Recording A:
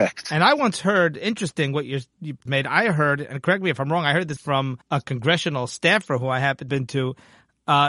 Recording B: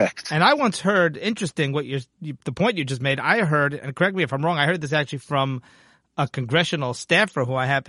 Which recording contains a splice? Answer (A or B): A